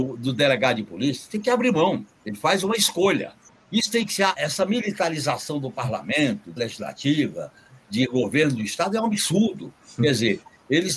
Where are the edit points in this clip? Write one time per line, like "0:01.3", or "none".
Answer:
0:04.3
0:06.6

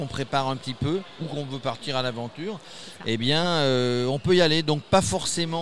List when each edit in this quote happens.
none

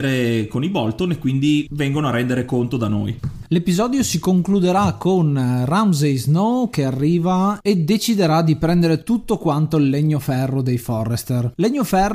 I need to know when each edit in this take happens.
none

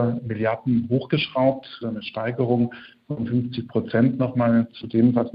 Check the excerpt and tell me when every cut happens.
0:01.8

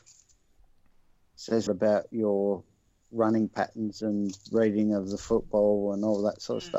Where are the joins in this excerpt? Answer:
0:01.7

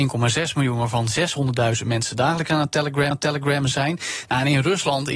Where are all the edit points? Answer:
0:03.1

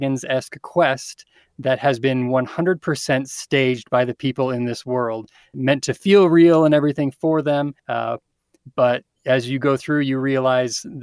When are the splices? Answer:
0:05.5
0:07.8

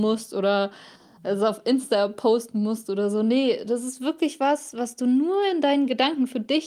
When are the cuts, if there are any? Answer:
none

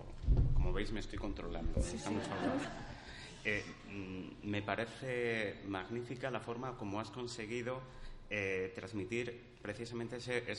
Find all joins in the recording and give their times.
none

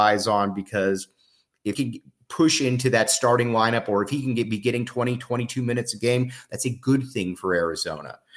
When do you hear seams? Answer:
0:01.7

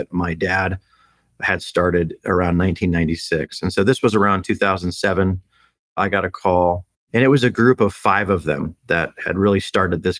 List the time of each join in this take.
none

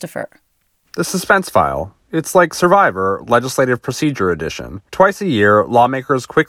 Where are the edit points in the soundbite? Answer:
0:04.9

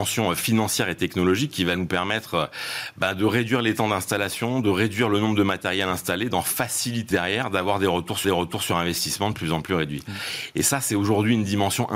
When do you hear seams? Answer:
0:07.1
0:08.2

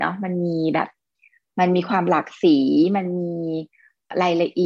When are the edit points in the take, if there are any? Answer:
none

